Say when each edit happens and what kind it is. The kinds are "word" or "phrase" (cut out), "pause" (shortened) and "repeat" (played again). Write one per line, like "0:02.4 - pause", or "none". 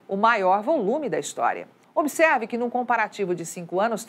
0:01.8 - pause